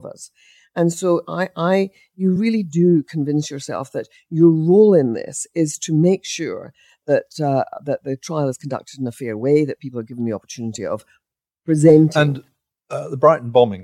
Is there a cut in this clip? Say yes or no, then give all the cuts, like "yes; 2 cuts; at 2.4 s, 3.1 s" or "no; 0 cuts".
no; 0 cuts